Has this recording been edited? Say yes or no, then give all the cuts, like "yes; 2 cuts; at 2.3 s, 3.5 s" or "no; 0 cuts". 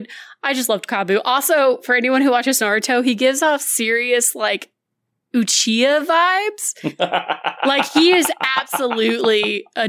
no; 0 cuts